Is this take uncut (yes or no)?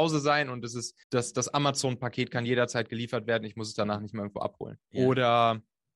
no